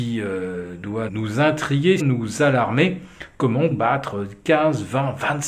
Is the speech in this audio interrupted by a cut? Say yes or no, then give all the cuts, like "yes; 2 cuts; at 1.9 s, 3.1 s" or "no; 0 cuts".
yes; 3 cuts; at 1.1 s, 2.0 s, 3.7 s